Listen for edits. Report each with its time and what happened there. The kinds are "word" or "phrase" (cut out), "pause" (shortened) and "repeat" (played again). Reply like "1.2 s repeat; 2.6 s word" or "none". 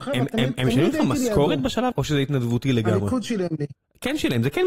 1.9 s word

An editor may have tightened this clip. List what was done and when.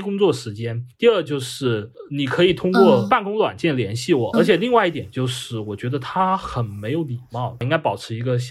4.3 s word

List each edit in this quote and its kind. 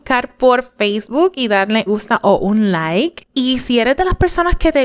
1.9 s phrase

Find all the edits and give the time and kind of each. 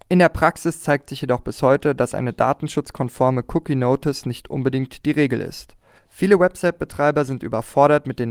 6.0 s pause

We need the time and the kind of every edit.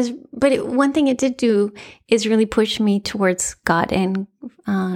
none

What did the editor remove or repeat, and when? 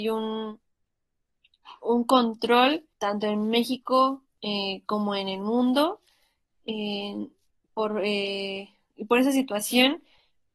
2.9 s pause; 7.5 s pause

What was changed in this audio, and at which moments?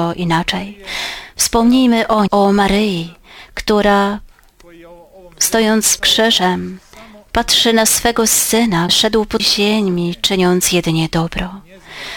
2.3 s word; 6.0 s word; 8.9 s word; 9.4 s word

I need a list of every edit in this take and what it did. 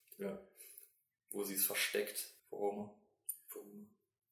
2.4 s pause

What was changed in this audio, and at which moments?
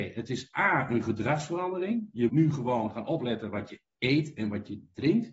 2.3 s word

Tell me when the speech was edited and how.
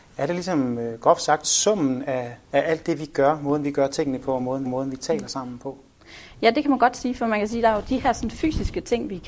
2.4 s pause; 4.6 s repeat

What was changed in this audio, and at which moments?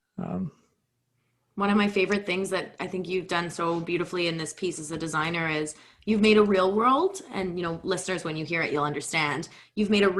none

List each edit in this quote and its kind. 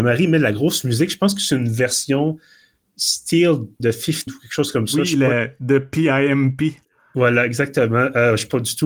3.8 s word; 4.3 s word

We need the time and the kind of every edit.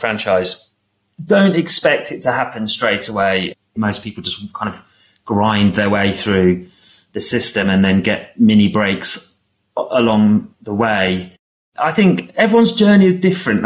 none

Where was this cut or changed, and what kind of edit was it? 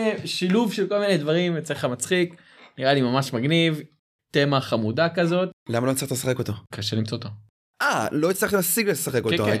6.7 s word

